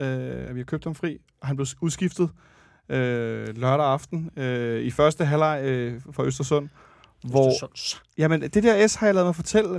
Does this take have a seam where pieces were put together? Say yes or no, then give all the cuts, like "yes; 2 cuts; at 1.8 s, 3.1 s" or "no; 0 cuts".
no; 0 cuts